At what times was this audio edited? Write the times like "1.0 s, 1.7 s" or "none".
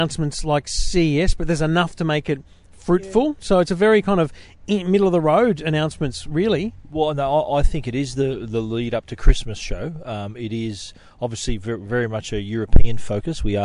none